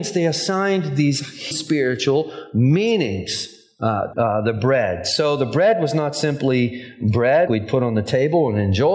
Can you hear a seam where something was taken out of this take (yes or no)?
yes